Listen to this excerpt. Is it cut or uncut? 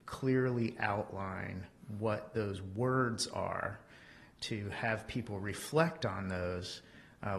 uncut